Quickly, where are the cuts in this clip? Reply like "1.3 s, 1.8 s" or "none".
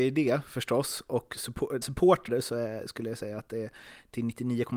1.8 s, 2.3 s